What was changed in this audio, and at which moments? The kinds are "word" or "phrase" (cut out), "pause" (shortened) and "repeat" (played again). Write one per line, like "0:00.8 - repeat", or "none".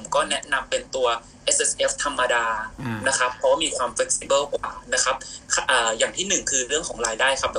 none